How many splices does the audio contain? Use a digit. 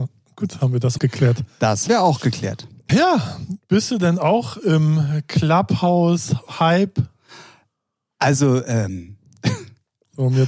3